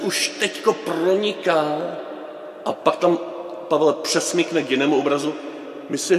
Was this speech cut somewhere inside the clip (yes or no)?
no